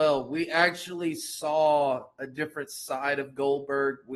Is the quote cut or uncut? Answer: uncut